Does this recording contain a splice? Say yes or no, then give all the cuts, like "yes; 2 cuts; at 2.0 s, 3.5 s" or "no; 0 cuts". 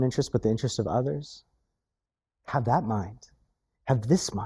no; 0 cuts